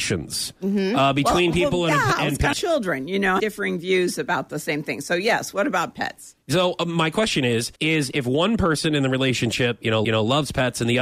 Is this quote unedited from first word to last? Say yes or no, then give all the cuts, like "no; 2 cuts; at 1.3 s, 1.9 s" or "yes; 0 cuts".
no; 5 cuts; at 1.5 s, 2.5 s, 3.4 s, 7.8 s, 10.0 s